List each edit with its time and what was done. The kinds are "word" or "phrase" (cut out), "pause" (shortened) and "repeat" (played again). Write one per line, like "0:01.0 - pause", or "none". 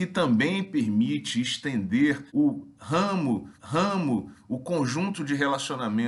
0:02.3 - pause
0:03.6 - repeat